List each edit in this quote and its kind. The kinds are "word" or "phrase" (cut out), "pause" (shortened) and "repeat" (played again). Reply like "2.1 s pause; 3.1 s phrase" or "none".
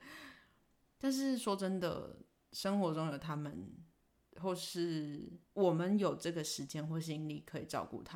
2.4 s pause; 4.1 s pause; 5.4 s pause